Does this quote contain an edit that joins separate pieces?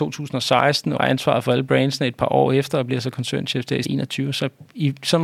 yes; 2 cuts; at 1.0 s, 3.8 s

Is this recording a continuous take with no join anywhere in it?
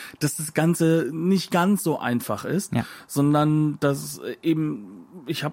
yes; 0 cuts

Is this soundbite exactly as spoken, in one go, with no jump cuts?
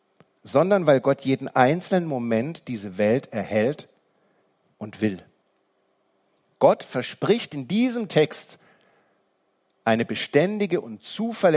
yes; 0 cuts

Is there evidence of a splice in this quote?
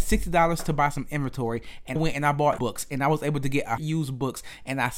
yes; 3 cuts; at 2.0 s, 2.6 s, 3.8 s

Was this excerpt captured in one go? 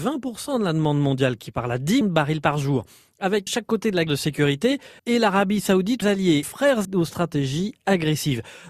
no; 8 cuts; at 1.5 s, 2.0 s, 3.5 s, 4.1 s, 5.0 s, 6.0 s, 6.4 s, 6.8 s

